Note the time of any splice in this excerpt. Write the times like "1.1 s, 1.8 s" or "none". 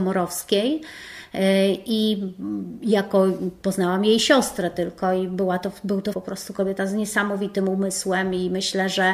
6.1 s